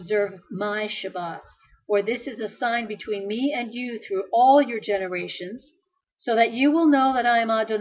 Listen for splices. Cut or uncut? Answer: uncut